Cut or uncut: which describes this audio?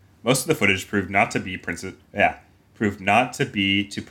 cut